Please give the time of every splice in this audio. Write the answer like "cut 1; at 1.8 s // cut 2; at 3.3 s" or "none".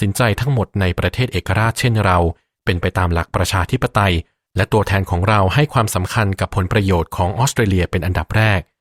none